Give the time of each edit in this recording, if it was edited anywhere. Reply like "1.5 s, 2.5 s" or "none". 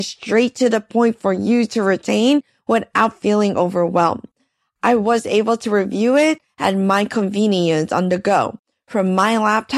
none